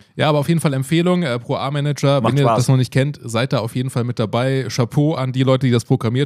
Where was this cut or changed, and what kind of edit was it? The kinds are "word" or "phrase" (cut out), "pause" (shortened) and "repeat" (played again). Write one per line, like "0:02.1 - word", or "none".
none